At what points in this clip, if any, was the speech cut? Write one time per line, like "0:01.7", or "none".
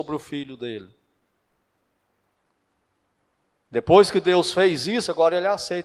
none